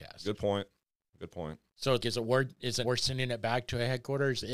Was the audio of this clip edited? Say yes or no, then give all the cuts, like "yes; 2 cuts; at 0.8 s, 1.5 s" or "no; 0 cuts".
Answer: yes; 2 cuts; at 2.0 s, 2.8 s